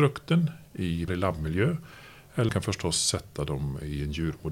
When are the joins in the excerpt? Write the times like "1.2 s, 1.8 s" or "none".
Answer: 1.1 s, 2.5 s